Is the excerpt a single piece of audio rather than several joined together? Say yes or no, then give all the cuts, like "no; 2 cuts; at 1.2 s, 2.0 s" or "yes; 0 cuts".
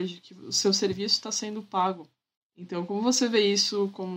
yes; 0 cuts